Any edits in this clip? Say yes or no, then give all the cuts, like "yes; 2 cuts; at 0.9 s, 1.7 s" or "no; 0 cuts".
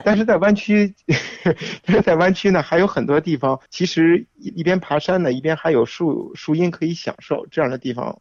yes; 2 cuts; at 3.7 s, 4.5 s